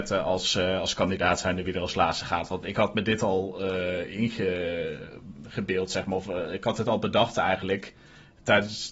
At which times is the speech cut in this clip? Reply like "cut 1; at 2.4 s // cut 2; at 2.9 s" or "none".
none